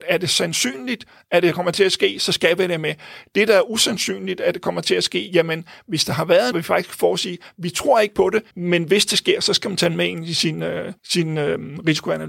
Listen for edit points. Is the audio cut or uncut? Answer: cut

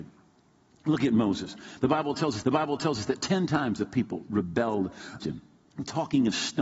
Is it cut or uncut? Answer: cut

